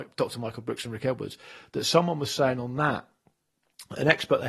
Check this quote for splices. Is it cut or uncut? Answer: uncut